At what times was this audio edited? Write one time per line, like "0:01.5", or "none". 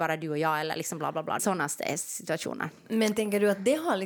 0:01.4